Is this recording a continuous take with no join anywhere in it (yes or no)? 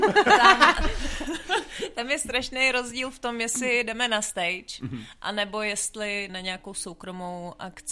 no